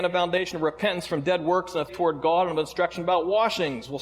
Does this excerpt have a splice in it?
yes; 1 cut; at 1.9 s

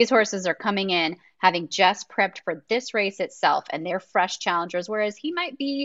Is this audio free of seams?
yes; 0 cuts

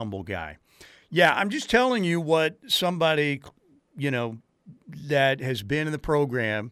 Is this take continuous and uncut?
yes; 0 cuts

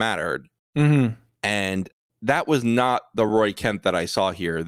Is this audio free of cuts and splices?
yes; 0 cuts

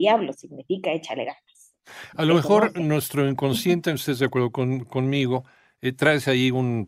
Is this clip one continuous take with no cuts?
yes; 0 cuts

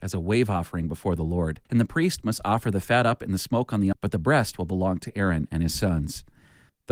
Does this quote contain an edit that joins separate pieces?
yes; 2 cuts; at 1.6 s, 3.9 s

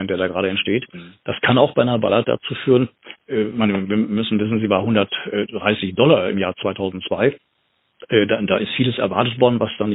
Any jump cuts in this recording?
no; 0 cuts

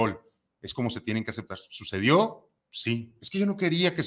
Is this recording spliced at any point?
yes; 1 cut; at 2.6 s

